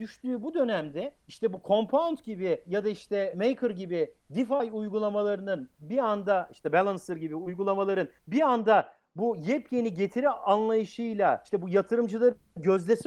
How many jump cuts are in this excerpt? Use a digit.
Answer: 2